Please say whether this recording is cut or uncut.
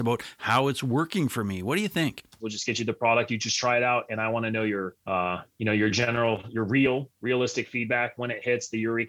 cut